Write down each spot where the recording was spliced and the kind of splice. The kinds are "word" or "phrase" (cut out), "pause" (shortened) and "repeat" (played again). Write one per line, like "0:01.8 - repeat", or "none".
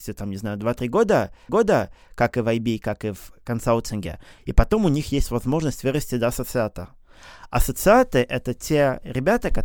0:01.5 - repeat

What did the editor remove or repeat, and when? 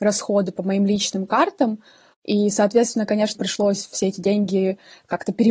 0:03.3 - word

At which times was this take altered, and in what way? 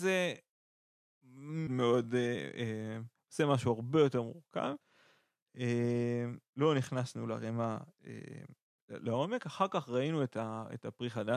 0:01.7 - word

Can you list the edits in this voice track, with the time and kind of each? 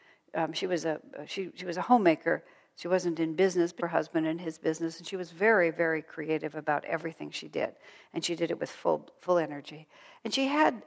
0:03.8 - phrase

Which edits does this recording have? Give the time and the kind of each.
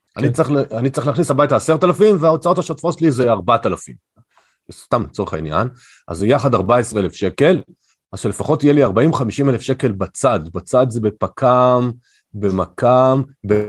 none

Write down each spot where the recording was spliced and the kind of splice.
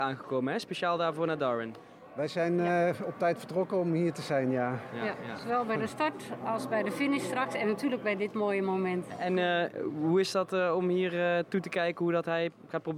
none

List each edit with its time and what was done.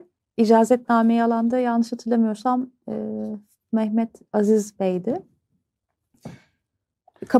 none

